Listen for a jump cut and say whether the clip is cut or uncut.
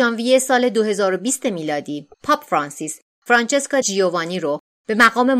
cut